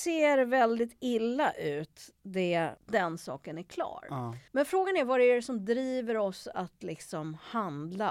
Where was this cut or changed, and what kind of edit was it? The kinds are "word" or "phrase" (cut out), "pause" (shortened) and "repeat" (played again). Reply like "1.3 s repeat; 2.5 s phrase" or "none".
2.8 s pause; 4.5 s pause